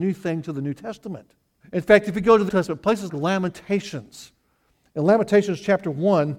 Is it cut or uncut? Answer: cut